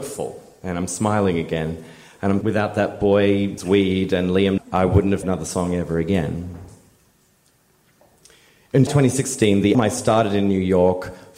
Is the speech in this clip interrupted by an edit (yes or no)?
yes